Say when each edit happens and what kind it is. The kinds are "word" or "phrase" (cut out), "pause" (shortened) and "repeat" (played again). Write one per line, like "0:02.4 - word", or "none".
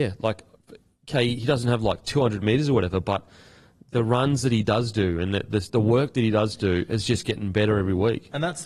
none